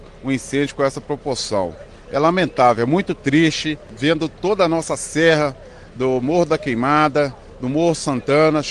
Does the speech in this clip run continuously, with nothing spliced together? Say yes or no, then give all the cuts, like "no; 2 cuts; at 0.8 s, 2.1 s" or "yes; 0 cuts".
yes; 0 cuts